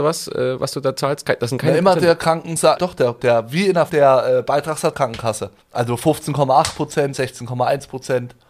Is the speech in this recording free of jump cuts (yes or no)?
no